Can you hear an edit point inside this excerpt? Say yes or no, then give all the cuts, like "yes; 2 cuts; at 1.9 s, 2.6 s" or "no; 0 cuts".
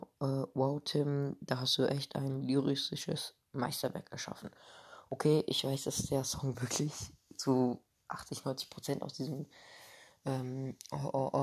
no; 0 cuts